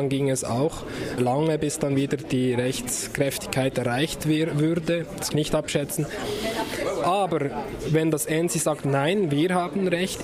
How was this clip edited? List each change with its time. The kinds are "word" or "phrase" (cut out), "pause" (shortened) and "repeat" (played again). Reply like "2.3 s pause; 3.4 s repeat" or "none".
1.2 s word; 5.3 s phrase